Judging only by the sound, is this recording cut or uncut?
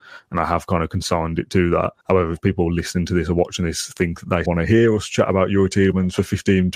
cut